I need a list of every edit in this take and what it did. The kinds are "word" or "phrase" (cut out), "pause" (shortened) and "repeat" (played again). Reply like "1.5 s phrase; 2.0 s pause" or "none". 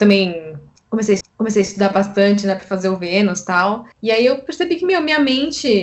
1.2 s repeat; 3.9 s pause